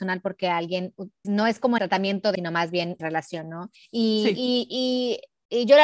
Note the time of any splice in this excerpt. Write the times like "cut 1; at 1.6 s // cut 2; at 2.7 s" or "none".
cut 1; at 1.2 s // cut 2; at 1.8 s // cut 3; at 2.3 s // cut 4; at 3.0 s // cut 5; at 3.8 s